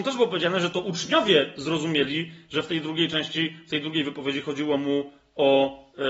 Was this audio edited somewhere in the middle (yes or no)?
no